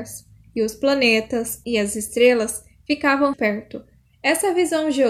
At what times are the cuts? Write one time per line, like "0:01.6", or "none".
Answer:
0:01.6
0:03.3